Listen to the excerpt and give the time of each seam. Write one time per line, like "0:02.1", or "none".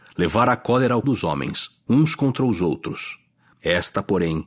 0:01.0